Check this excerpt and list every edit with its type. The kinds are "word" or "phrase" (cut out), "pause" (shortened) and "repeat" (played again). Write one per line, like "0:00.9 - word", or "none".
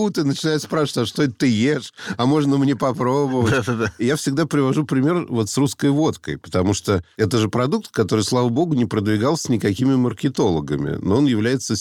none